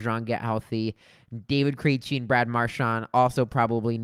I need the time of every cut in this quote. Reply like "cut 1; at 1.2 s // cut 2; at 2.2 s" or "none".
none